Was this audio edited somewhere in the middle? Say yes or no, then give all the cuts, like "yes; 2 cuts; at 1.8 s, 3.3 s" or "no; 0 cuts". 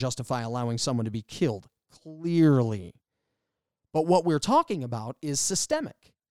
no; 0 cuts